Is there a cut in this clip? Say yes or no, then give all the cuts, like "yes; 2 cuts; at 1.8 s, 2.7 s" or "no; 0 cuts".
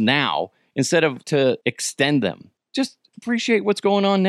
yes; 3 cuts; at 1.2 s, 1.6 s, 2.6 s